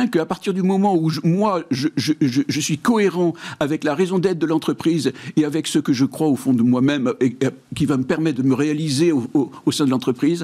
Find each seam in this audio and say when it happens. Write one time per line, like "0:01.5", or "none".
none